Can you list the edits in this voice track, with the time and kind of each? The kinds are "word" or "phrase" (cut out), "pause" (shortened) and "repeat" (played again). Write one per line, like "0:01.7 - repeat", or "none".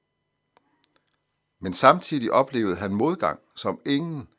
none